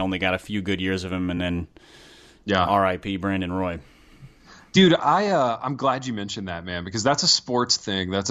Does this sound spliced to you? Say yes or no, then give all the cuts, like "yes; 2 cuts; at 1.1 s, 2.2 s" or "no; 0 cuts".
no; 0 cuts